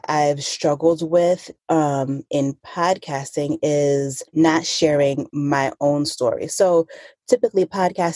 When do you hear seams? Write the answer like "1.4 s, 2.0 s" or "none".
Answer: 1.6 s, 4.3 s